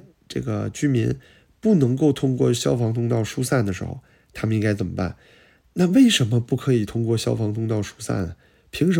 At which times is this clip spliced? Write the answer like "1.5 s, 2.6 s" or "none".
none